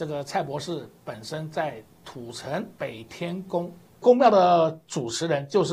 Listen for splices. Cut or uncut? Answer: cut